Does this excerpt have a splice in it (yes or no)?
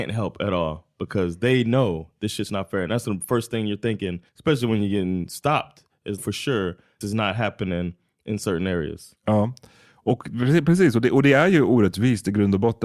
yes